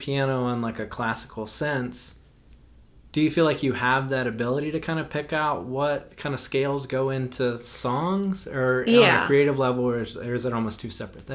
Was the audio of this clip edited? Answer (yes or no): no